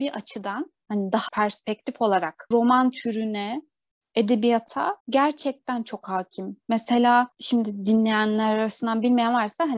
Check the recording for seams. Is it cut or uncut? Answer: cut